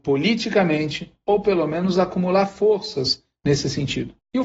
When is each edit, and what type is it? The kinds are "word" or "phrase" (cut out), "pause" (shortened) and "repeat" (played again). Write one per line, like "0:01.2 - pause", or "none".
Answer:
none